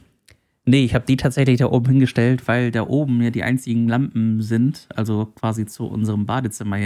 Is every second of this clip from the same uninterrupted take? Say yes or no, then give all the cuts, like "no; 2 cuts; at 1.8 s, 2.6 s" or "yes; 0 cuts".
yes; 0 cuts